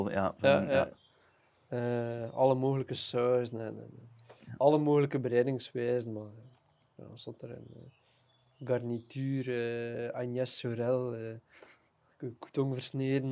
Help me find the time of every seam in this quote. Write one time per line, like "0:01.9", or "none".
none